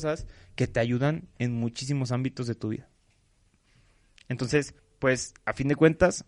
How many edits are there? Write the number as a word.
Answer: one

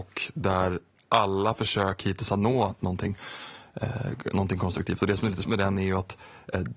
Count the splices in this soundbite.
two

